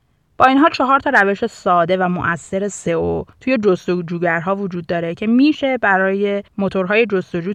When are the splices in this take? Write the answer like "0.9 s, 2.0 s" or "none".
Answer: 6.5 s